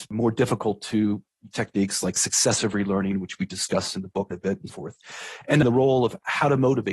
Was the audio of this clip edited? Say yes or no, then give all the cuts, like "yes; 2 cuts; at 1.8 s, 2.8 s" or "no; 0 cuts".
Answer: yes; 4 cuts; at 1.5 s, 4.3 s, 4.7 s, 5.6 s